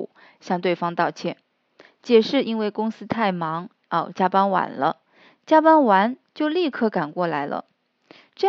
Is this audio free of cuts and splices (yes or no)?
yes